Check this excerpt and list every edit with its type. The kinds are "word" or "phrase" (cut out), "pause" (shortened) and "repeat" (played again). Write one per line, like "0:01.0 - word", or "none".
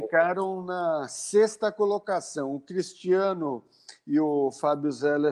none